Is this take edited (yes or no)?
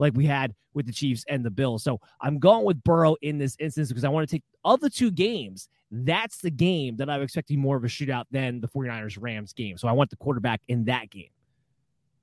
no